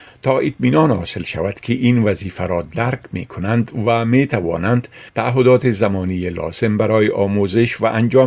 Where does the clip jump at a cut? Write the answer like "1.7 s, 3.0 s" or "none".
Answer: 5.1 s